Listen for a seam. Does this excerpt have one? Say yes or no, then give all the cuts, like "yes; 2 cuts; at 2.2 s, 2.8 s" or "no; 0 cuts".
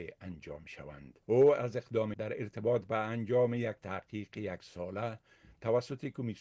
yes; 2 cuts; at 1.2 s, 2.1 s